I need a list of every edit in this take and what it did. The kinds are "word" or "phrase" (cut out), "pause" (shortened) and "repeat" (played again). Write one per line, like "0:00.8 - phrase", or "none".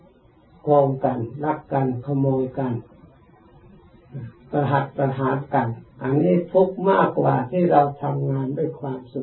0:05.9 - pause